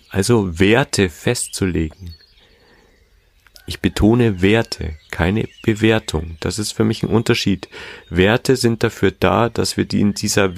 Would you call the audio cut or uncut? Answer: uncut